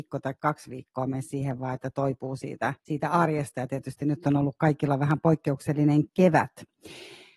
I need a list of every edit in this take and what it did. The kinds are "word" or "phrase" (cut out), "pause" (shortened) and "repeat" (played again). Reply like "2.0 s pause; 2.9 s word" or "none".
2.8 s pause

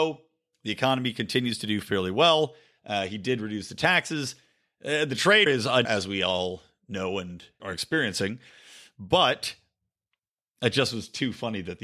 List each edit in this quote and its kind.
5.5 s word; 5.9 s word; 7.6 s word

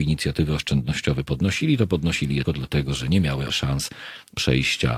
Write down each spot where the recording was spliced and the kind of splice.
2.5 s word; 3.5 s word

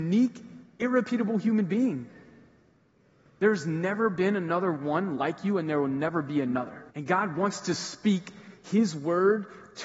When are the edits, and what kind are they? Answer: 6.9 s pause

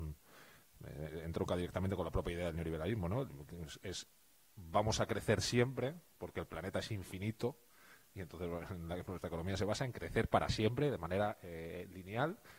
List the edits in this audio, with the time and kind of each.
none

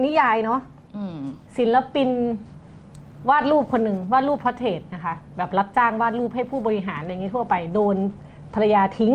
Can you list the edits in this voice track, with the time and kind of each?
1.4 s pause

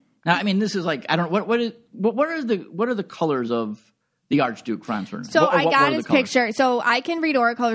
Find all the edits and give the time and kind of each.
none

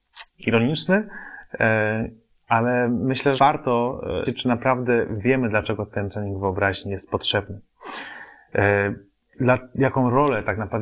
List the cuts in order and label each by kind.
3.4 s word; 4.2 s word

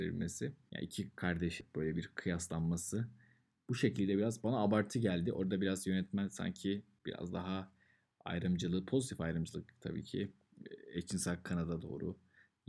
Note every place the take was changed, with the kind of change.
none

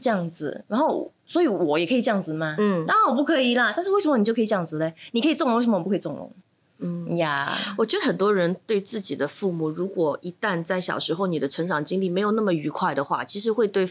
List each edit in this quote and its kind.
none

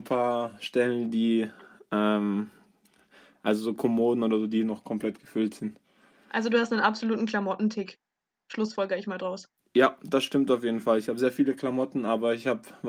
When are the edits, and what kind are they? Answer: none

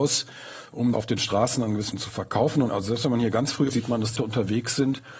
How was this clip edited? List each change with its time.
0.9 s word; 1.9 s word; 2.7 s word; 3.7 s word; 4.2 s word

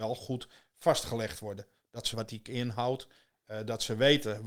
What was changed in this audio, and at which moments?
2.1 s word; 2.4 s word

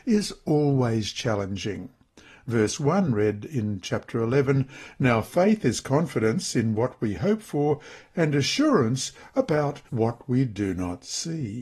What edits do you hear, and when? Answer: 9.9 s pause

